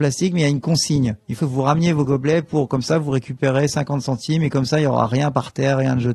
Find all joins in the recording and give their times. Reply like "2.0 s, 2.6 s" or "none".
1.4 s